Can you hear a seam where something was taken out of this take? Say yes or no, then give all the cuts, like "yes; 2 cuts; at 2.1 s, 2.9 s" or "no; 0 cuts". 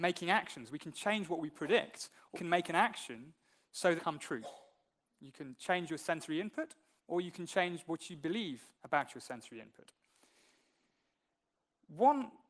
yes; 4 cuts; at 2.3 s, 4.0 s, 7.0 s, 8.8 s